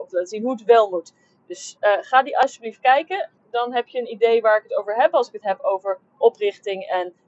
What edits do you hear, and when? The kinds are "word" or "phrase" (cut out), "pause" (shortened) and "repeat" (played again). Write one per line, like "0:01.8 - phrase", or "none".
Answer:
none